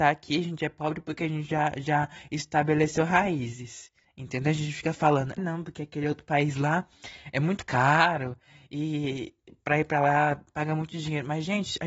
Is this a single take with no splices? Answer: no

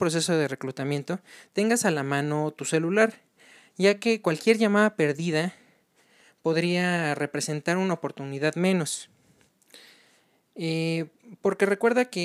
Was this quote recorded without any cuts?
yes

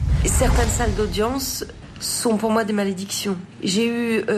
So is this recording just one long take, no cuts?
yes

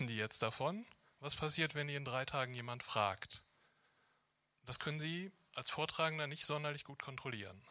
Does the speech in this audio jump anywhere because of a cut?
no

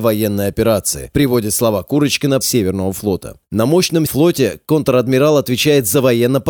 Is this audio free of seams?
no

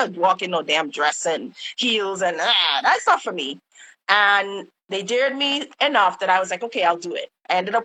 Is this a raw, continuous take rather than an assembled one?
yes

